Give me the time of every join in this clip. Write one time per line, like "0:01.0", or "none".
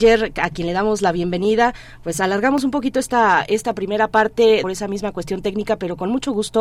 0:04.6

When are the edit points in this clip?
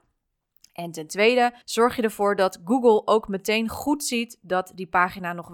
0:01.6

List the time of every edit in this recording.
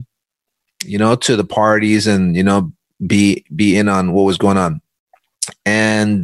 none

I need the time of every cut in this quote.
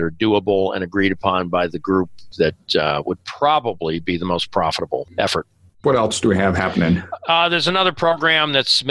none

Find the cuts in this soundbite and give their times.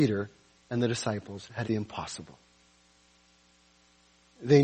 0:01.6

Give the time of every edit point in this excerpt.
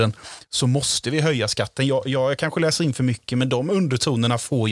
none

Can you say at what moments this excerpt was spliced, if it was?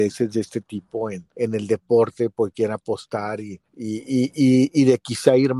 0:01.3
0:03.7

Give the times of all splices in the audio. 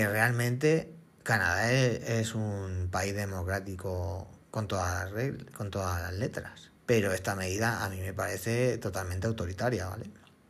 0:04.4
0:06.8

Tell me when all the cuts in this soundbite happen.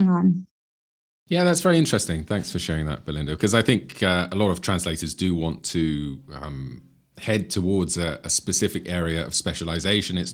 none

